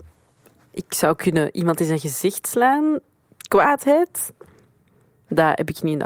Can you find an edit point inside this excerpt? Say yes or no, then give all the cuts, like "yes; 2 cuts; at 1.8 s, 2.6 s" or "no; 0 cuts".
no; 0 cuts